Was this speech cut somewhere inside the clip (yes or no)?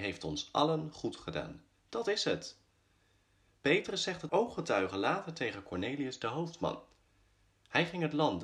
yes